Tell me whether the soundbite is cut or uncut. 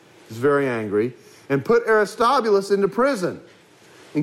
uncut